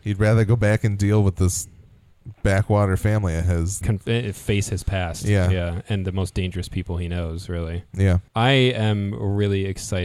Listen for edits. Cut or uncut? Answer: cut